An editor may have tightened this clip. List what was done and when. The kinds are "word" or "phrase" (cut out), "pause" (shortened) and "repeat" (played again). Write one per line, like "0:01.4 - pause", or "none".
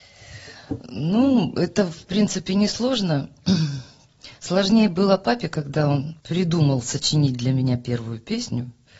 0:06.2 - pause